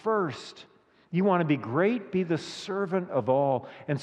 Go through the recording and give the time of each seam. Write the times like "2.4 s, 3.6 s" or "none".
none